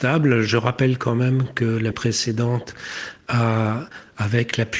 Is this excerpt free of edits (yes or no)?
no